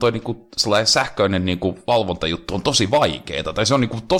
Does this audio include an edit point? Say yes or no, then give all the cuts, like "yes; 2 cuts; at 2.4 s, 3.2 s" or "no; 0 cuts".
no; 0 cuts